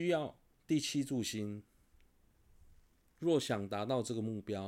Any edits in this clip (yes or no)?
no